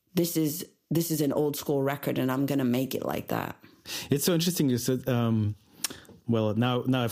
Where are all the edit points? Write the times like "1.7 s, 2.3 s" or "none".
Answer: 6.2 s